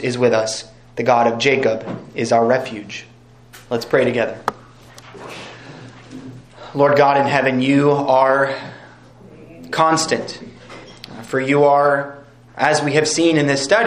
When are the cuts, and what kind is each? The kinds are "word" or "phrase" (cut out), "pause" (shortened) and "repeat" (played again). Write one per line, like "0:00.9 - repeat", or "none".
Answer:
0:03.6 - pause